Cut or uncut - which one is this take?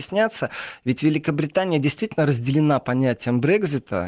uncut